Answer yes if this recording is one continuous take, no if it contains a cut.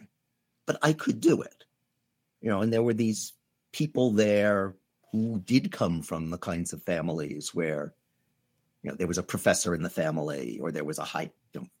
yes